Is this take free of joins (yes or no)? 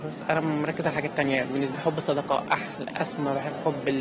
no